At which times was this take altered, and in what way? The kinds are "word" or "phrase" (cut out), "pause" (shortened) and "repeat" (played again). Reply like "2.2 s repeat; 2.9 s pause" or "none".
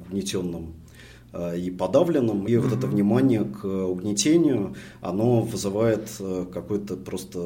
2.5 s word

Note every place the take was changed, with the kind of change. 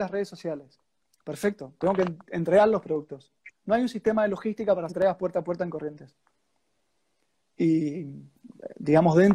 4.9 s word

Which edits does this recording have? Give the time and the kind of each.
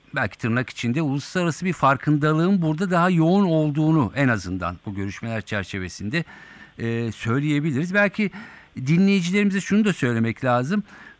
none

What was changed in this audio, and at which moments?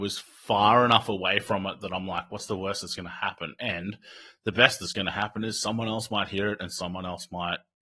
none

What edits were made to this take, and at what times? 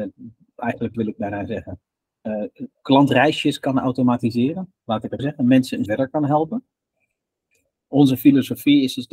0.9 s word; 2.7 s word; 5.2 s word; 5.9 s word

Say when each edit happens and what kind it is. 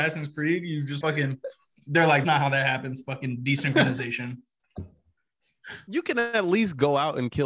1.0 s word; 2.2 s word

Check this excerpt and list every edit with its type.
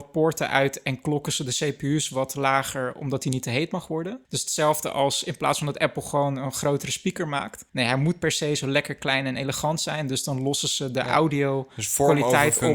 4.2 s pause; 7.7 s pause

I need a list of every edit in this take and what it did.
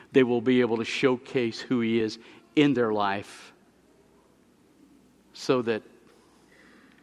none

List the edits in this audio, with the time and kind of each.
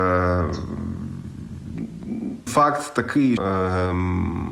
2.5 s word; 3.4 s word

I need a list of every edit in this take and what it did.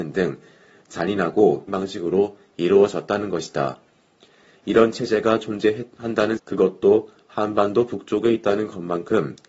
1.7 s word; 5.4 s word; 6.4 s word

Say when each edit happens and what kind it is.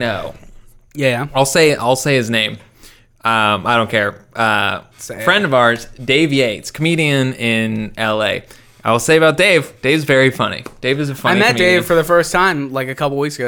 none

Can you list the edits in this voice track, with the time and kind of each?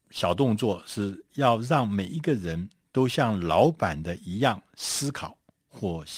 none

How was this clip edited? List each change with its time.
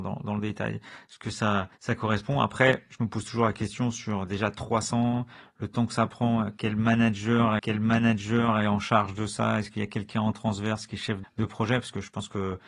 1.7 s pause; 7.6 s repeat; 11.2 s word

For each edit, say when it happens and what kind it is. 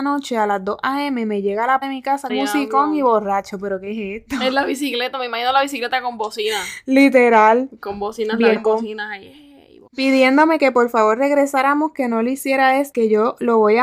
1.8 s word; 2.3 s word; 8.6 s word; 9.9 s pause; 12.9 s phrase

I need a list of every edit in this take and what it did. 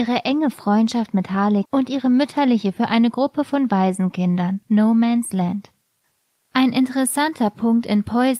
1.6 s word; 2.7 s word; 4.6 s pause

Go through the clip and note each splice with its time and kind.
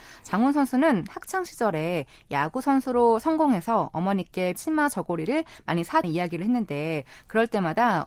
4.5 s word; 6.0 s word

